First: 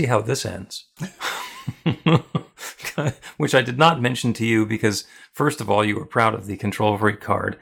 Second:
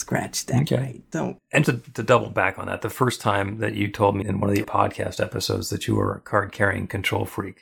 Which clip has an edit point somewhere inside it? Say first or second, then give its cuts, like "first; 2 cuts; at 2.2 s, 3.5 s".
second; 3 cuts; at 1.6 s, 4.2 s, 4.6 s